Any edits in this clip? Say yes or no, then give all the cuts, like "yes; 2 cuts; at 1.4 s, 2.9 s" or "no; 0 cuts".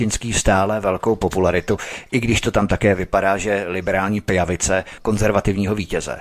yes; 1 cut; at 5.0 s